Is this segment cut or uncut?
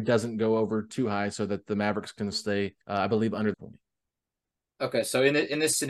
cut